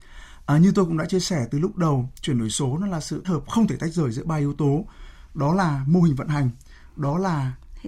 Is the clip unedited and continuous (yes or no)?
no